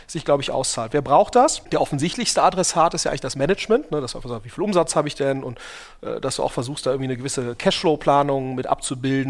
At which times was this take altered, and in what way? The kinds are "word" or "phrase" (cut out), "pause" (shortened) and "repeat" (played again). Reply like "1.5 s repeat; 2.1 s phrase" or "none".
none